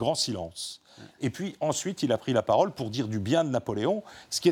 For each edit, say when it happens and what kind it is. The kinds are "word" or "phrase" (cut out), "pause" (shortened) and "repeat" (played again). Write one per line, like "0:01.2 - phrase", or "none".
none